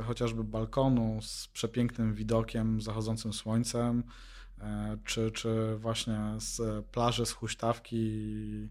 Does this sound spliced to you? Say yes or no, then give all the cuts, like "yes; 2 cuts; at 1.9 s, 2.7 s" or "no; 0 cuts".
no; 0 cuts